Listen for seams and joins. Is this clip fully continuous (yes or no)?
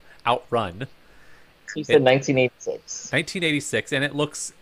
no